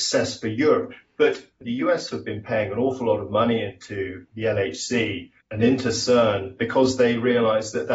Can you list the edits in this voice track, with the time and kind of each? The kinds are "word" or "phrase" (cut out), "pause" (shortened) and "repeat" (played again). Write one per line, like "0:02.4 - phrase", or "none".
0:05.4 - pause